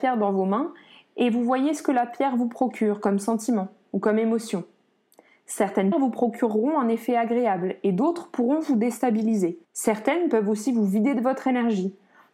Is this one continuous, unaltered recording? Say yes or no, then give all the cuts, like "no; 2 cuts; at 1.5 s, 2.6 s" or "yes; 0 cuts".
no; 2 cuts; at 5.9 s, 9.6 s